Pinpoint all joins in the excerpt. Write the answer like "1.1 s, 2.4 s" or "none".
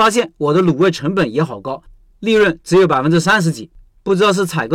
none